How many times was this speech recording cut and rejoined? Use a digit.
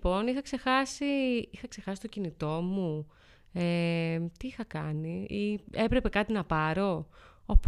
0